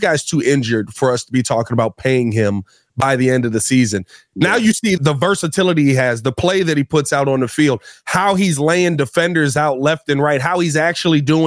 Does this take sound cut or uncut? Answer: cut